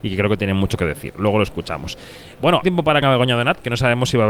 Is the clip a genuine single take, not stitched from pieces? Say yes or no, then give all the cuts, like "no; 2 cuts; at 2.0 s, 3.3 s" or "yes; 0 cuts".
no; 2 cuts; at 2.6 s, 3.0 s